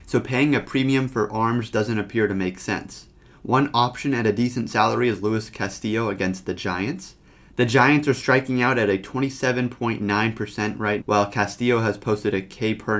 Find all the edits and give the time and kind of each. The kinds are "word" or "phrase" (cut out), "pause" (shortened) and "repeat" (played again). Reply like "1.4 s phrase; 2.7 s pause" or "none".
11.0 s word